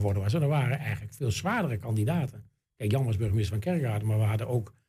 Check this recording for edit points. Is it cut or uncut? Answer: uncut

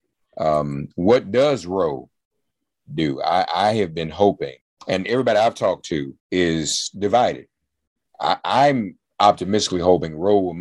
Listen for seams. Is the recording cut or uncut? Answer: cut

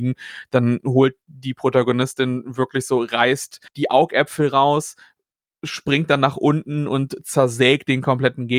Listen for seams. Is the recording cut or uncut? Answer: cut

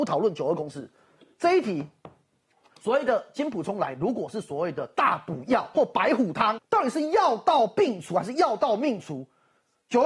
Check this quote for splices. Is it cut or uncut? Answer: cut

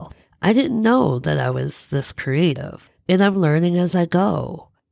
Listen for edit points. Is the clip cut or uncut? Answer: uncut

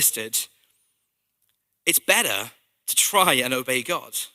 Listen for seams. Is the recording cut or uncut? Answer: uncut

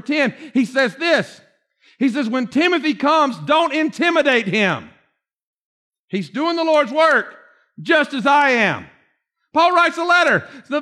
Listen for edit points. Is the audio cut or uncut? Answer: uncut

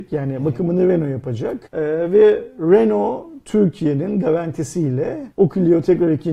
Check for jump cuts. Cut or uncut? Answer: cut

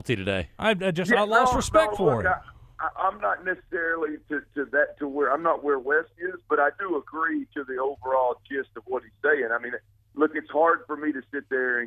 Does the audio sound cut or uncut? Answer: cut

